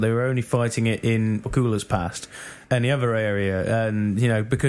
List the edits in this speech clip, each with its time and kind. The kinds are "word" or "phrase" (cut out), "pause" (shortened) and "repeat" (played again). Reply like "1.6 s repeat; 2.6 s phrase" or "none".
1.4 s word; 2.6 s phrase